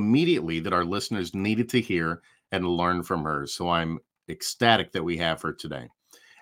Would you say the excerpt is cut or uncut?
uncut